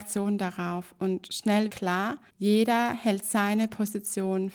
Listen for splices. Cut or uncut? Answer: cut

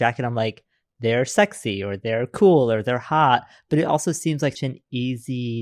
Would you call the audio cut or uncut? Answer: cut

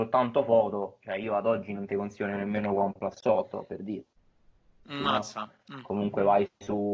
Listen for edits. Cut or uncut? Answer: uncut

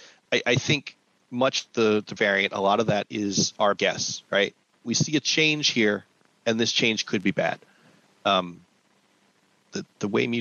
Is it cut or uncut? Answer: cut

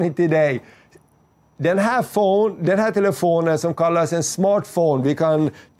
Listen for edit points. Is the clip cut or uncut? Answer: uncut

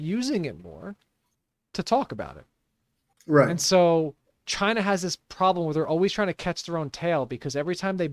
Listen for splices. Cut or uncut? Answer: uncut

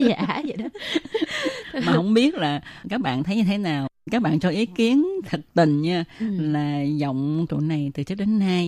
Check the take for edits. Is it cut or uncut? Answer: cut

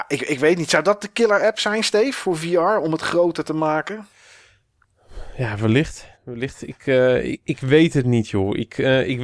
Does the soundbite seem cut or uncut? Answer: cut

